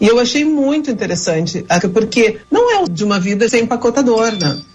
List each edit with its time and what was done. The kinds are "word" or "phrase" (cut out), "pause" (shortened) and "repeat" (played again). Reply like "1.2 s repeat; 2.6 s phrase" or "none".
1.8 s word; 2.4 s pause; 2.9 s word; 3.5 s word